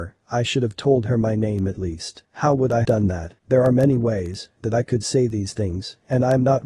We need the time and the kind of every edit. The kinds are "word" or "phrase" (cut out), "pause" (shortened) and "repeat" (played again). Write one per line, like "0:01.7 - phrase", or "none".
0:02.2 - pause
0:02.8 - word
0:03.4 - pause